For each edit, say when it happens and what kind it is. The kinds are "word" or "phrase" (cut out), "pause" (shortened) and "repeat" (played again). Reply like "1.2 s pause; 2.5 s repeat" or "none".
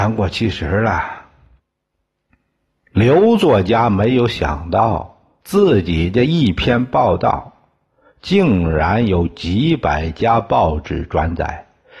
1.6 s pause